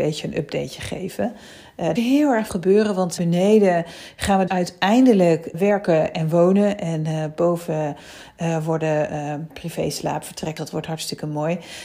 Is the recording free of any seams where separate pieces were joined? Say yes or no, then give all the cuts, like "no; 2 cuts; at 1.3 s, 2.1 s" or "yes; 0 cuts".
no; 7 cuts; at 2.0 s, 2.5 s, 3.2 s, 4.5 s, 5.5 s, 9.5 s, 10.6 s